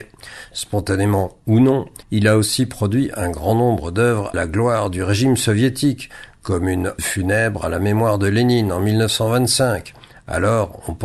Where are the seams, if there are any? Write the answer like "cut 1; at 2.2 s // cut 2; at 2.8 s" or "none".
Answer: cut 1; at 2.0 s // cut 2; at 4.3 s // cut 3; at 7.0 s